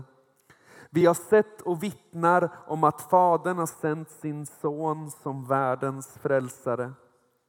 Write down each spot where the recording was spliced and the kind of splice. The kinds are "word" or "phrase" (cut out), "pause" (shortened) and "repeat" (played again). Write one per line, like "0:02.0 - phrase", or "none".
none

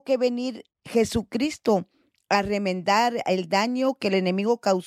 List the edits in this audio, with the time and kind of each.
none

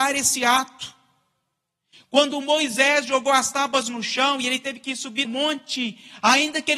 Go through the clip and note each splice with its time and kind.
0:05.2 - word

